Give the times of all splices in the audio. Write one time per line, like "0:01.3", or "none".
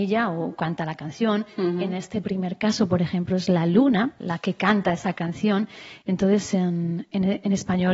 0:04.2